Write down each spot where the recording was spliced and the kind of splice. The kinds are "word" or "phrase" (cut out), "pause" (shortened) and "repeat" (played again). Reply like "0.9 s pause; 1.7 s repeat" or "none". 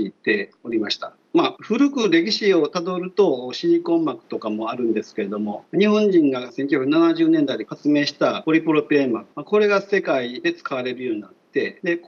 9.3 s pause